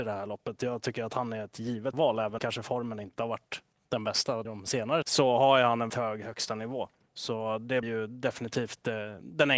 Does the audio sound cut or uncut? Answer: cut